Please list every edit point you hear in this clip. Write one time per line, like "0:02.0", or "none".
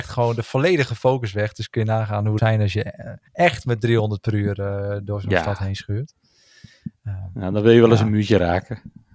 0:02.4
0:03.3